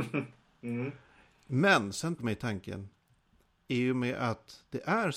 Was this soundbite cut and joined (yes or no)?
yes